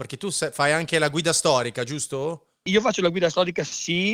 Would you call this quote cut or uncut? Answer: uncut